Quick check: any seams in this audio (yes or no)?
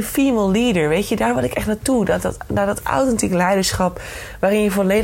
no